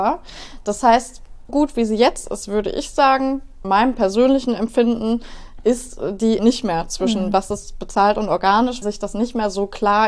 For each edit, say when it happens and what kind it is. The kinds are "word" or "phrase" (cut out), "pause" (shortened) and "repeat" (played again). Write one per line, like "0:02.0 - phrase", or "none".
0:01.5 - word
0:03.6 - word
0:06.4 - word
0:08.8 - word